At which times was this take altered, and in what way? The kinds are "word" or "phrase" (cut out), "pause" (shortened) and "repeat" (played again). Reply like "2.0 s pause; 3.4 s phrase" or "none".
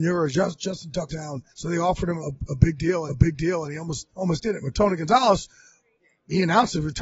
1.1 s word; 1.5 s pause; 2.2 s word; 3.1 s repeat; 4.1 s pause